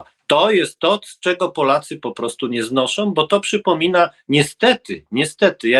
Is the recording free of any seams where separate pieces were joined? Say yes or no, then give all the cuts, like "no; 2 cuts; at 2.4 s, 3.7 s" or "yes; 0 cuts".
yes; 0 cuts